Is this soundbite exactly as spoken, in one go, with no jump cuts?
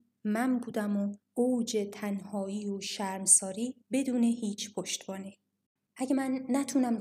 no; 3 cuts; at 1.2 s, 3.8 s, 5.7 s

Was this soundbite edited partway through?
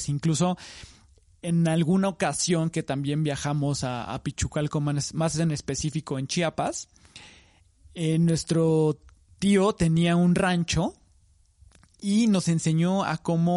no; 0 cuts

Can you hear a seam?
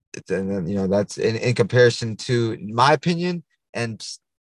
no; 0 cuts

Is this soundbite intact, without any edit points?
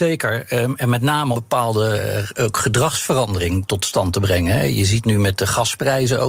no; 2 cuts; at 1.3 s, 5.0 s

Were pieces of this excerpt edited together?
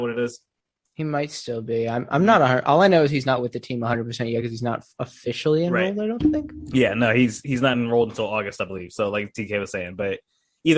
no; 0 cuts

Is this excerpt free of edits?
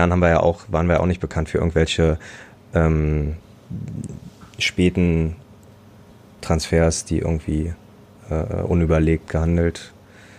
yes; 0 cuts

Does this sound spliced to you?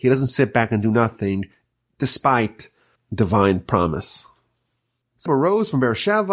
yes; 2 cuts; at 3.0 s, 5.3 s

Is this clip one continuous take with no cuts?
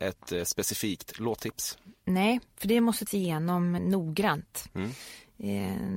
no; 2 cuts; at 3.1 s, 3.8 s

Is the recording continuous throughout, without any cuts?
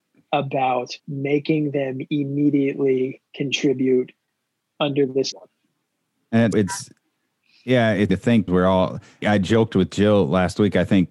no; 7 cuts; at 1.0 s, 3.3 s, 5.3 s, 6.5 s, 8.1 s, 8.5 s, 9.2 s

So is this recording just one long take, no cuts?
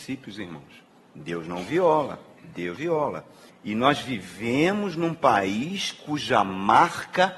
no; 3 cuts; at 0.9 s, 2.8 s, 3.5 s

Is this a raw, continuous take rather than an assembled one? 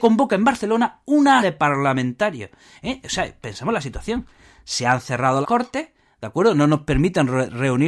no; 2 cuts; at 1.4 s, 5.4 s

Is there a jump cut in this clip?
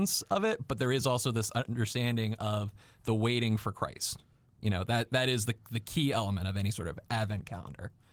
no; 0 cuts

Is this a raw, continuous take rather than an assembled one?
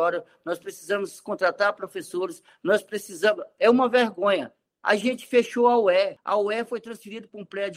yes; 0 cuts

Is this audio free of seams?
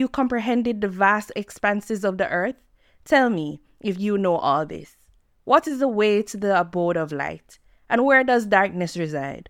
yes; 0 cuts

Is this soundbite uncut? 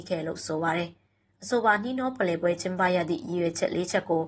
yes; 0 cuts

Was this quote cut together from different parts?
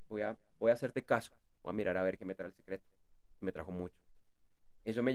yes; 1 cut; at 2.2 s

